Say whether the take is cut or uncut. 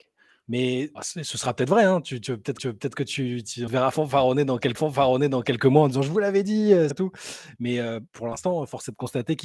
cut